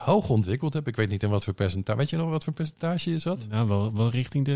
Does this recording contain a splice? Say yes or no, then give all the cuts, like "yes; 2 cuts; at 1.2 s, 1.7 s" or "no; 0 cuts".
no; 0 cuts